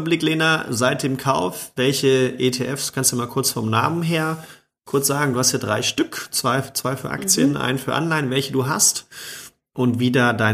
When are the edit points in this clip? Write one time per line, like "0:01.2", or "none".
none